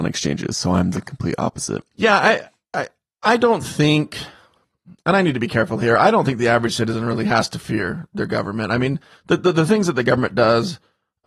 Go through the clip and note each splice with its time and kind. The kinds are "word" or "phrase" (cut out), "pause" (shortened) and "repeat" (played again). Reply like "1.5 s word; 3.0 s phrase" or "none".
none